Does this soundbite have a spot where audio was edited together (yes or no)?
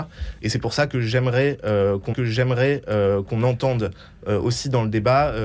yes